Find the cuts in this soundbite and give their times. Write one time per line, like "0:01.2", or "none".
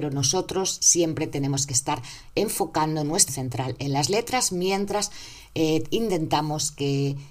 0:03.3